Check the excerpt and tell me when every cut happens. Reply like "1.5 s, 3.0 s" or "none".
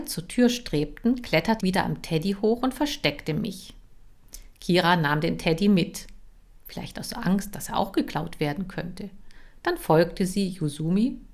1.6 s